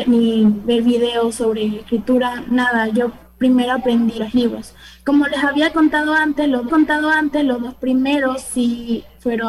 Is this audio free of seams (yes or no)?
no